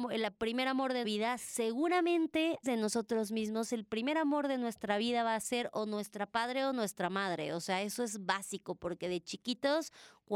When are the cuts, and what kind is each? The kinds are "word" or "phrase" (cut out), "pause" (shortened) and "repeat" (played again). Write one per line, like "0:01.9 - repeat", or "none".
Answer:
0:01.0 - word
0:02.6 - word